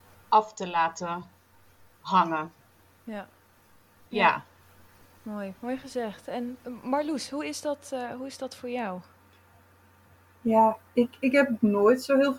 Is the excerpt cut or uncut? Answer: uncut